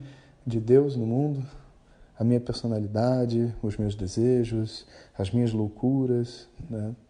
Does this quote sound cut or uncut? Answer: uncut